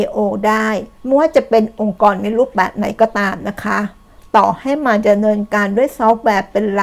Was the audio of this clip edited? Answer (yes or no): yes